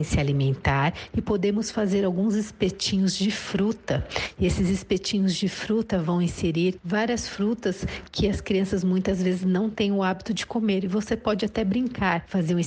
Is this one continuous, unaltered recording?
yes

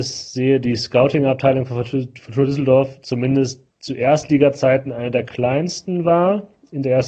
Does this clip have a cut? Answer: yes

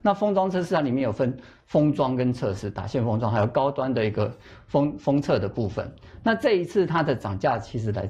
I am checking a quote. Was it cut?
no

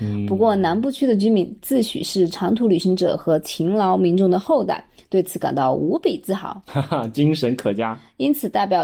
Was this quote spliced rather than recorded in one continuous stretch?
no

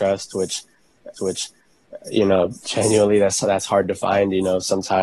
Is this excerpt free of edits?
no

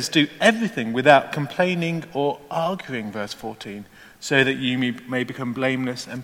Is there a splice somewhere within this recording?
no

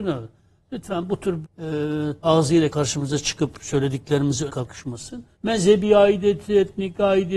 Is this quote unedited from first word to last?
no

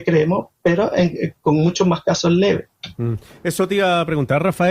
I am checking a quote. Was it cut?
no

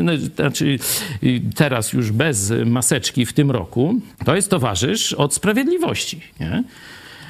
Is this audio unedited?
no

